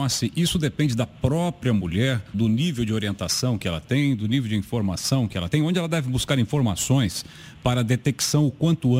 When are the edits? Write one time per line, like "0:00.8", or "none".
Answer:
0:02.3